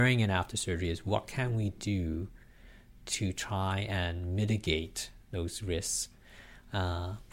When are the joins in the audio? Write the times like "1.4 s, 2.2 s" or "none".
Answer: none